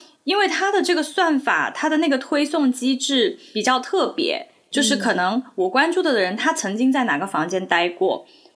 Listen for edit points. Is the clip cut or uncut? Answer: uncut